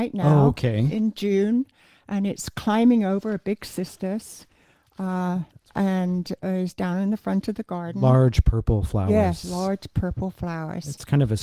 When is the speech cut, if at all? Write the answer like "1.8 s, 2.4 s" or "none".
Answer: 9.4 s